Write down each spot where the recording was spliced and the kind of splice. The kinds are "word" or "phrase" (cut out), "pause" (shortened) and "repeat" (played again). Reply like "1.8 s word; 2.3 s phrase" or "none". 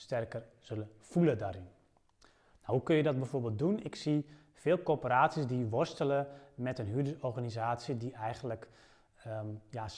none